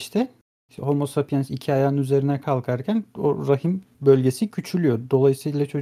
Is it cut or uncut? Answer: uncut